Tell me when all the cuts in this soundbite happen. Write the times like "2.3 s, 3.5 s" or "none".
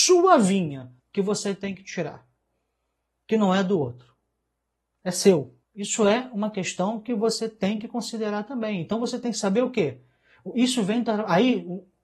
1.0 s, 5.6 s